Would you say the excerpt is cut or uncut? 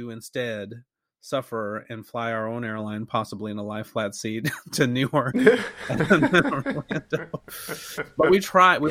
uncut